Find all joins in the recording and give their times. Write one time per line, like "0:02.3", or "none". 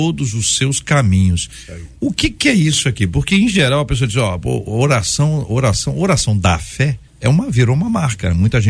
0:07.1